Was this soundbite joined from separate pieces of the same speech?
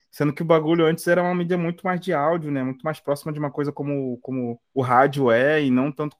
yes; 1 cut; at 4.6 s

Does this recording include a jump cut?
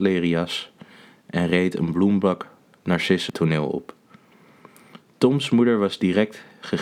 yes; 1 cut; at 3.3 s

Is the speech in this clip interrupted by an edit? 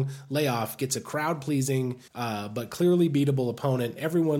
yes; 1 cut; at 2.1 s

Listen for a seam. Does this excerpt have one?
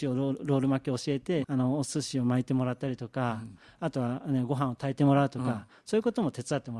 yes; 1 cut; at 1.4 s

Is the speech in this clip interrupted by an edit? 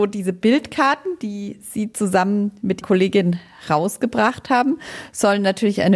yes; 1 cut; at 2.8 s

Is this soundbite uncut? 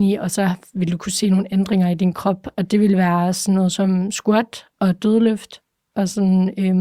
yes; 0 cuts

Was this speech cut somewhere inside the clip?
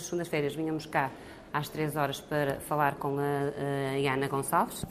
no; 0 cuts

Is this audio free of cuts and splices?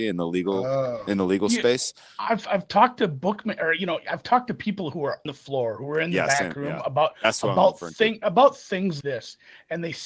no; 2 cuts; at 5.3 s, 9.0 s

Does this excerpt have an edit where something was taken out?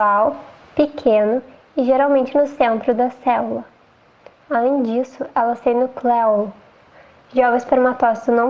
no; 0 cuts

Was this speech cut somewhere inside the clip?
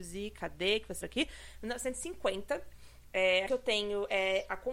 yes; 2 cuts; at 1.0 s, 3.5 s

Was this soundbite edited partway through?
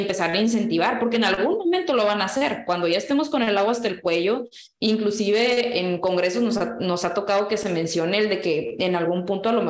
no; 0 cuts

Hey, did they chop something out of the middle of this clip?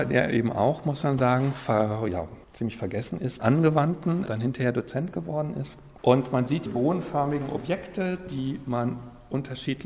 yes; 4 cuts; at 2.4 s, 3.4 s, 4.3 s, 6.7 s

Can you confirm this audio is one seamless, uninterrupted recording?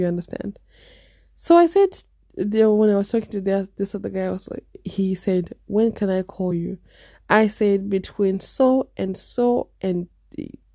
yes; 0 cuts

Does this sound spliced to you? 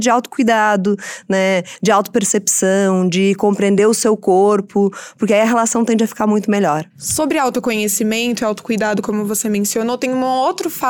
no; 0 cuts

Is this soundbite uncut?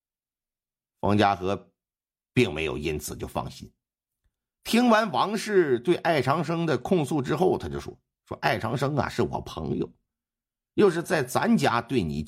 yes; 0 cuts

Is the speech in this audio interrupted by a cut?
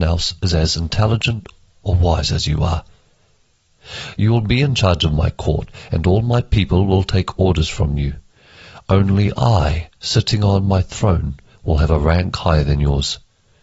no; 0 cuts

